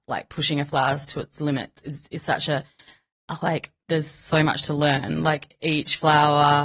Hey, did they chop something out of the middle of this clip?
no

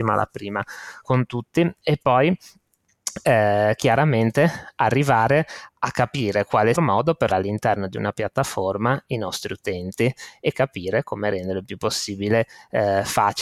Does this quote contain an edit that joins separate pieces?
yes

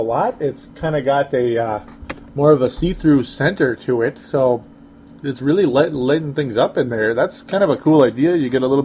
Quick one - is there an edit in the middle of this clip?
no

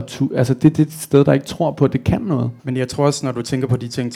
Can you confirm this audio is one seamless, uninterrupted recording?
no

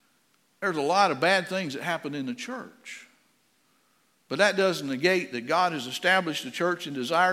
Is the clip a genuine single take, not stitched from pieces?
yes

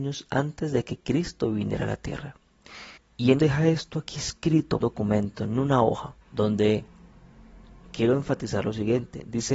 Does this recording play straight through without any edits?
no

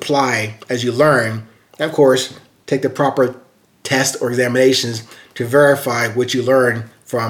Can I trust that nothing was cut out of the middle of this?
yes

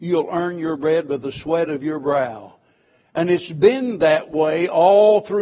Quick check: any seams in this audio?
no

